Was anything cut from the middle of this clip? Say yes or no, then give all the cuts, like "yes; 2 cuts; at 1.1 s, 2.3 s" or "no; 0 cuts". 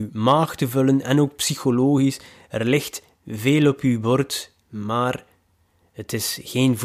no; 0 cuts